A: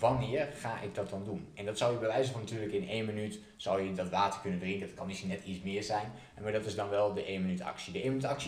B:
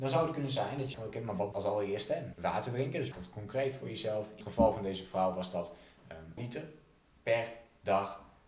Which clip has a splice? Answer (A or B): B